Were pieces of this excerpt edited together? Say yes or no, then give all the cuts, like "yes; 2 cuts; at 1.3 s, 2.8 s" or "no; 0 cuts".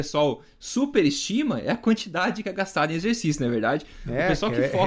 yes; 1 cut; at 2.4 s